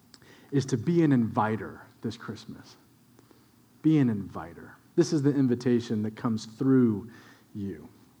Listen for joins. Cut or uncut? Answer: uncut